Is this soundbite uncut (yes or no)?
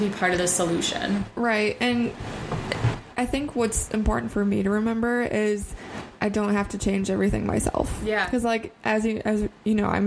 yes